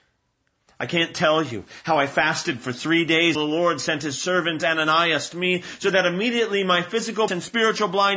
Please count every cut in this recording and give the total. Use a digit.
3